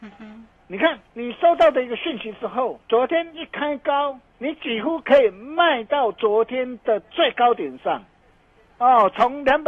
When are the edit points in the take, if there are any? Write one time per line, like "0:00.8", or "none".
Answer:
0:01.1
0:02.8
0:04.3

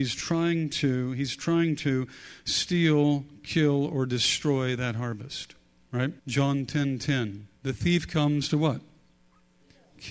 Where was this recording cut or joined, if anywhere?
0:06.2
0:07.6

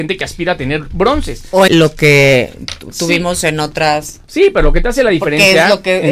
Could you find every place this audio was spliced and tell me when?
0:01.7

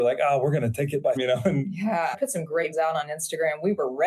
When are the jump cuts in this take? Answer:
0:01.2
0:02.1
0:02.7

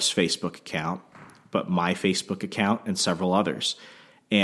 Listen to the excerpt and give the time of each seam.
none

